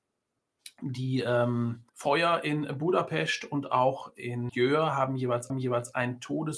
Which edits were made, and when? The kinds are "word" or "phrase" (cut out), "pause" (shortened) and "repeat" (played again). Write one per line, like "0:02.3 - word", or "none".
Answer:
0:01.9 - pause
0:04.5 - word
0:05.5 - repeat